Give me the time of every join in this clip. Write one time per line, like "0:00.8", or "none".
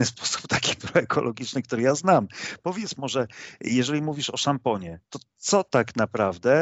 0:05.0